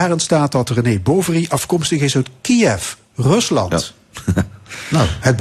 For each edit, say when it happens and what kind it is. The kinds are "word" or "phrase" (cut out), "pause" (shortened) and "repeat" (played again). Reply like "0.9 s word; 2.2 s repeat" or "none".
none